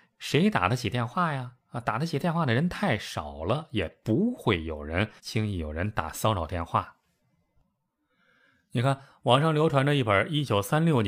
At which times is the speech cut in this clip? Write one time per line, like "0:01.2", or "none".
0:05.2